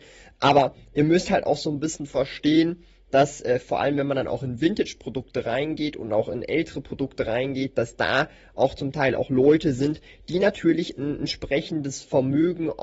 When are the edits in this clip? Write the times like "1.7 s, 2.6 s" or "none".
none